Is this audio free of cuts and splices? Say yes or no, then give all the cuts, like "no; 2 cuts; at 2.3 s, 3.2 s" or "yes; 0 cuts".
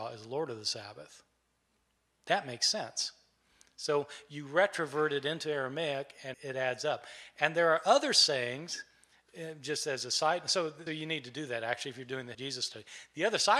no; 3 cuts; at 6.3 s, 10.9 s, 12.3 s